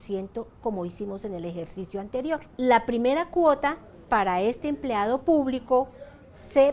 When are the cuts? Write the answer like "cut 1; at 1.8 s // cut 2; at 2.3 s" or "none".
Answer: cut 1; at 2.5 s